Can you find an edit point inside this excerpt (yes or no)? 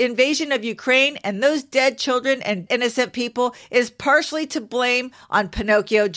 yes